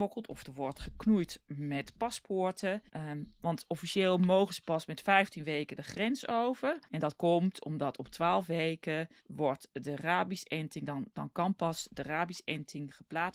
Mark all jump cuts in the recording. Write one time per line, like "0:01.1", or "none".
0:02.9
0:06.9
0:09.2